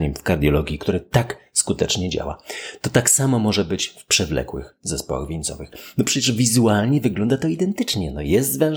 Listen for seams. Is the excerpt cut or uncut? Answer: uncut